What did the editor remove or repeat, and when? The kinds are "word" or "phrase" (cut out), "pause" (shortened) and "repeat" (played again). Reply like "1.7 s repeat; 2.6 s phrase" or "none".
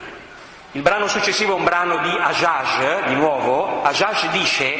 none